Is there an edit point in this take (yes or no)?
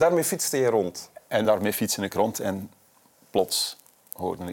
no